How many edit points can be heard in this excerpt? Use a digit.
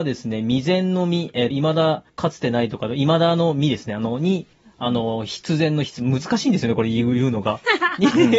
3